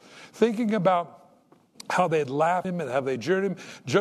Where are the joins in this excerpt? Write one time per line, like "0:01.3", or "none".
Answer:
0:02.6